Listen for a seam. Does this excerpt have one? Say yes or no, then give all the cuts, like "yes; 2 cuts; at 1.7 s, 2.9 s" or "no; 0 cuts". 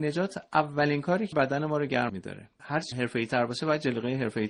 yes; 4 cuts; at 1.3 s, 2.1 s, 2.6 s, 2.9 s